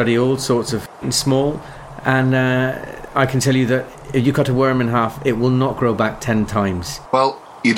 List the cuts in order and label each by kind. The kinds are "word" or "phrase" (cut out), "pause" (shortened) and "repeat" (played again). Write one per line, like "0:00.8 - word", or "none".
0:01.0 - phrase

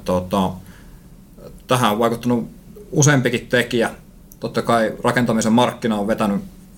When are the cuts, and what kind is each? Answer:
none

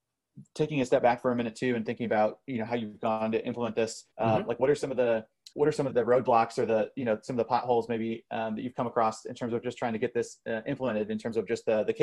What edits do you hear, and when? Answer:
0:04.1 - pause
0:05.5 - pause
0:05.9 - word

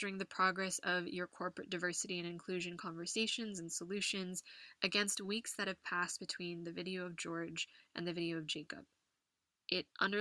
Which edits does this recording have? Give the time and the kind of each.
none

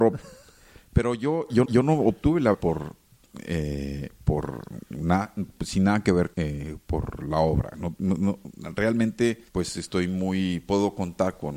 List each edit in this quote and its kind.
0:01.6 - repeat
0:02.5 - word
0:06.3 - pause
0:09.5 - pause

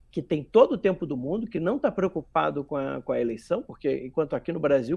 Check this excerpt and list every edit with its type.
none

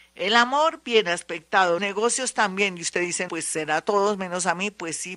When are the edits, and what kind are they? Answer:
0:01.8 - word
0:03.3 - word

